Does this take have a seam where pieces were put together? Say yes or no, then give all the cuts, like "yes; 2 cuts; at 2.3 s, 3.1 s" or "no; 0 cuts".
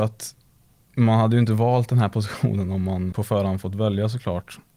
yes; 1 cut; at 3.1 s